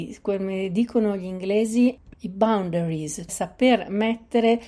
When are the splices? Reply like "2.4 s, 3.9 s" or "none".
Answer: 2.1 s, 3.3 s

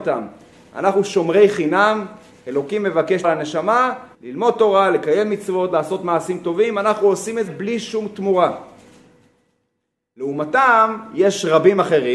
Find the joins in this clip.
3.2 s, 4.1 s, 7.5 s

